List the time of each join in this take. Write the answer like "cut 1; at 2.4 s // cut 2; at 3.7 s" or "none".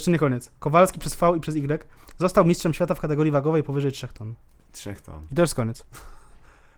none